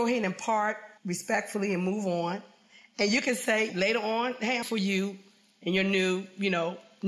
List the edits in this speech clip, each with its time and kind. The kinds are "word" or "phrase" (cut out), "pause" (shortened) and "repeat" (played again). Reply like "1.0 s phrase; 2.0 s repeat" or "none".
1.0 s pause; 3.7 s word; 4.6 s word

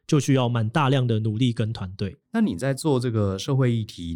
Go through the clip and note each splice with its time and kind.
2.2 s pause

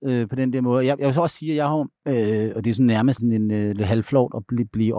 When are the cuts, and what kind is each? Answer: 2.0 s pause; 3.2 s word

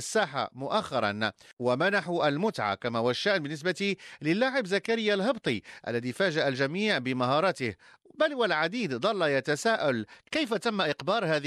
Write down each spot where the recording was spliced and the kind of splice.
none

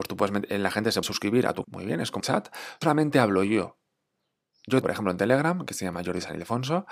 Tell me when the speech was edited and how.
1.0 s word; 1.6 s word; 2.2 s word; 2.8 s word; 4.8 s word

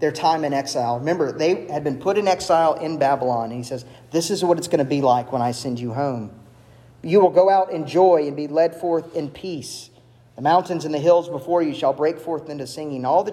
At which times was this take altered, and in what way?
none

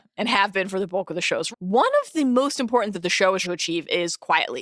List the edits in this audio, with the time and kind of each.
1.5 s word; 2.9 s word; 3.4 s word

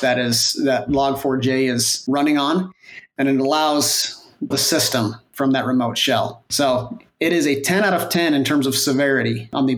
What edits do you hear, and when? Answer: 4.5 s phrase

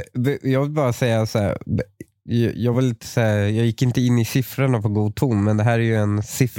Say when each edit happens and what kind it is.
none

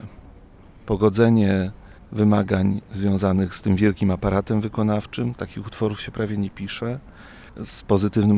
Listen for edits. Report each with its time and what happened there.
none

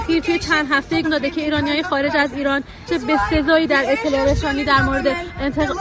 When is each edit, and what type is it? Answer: 1.0 s phrase; 2.9 s word

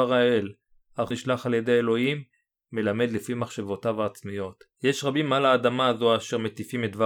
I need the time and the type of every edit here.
1.1 s phrase

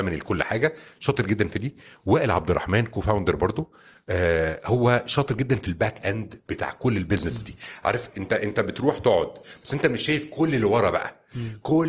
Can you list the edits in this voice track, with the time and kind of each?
none

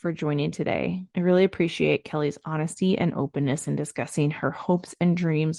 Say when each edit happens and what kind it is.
1.1 s pause

